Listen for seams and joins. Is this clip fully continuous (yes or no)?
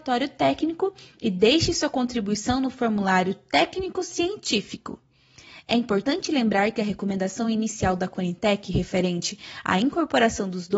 yes